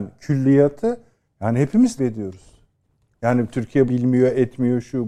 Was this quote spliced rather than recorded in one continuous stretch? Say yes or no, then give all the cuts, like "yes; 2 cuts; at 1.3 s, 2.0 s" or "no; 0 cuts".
yes; 3 cuts; at 1.3 s, 2.0 s, 3.9 s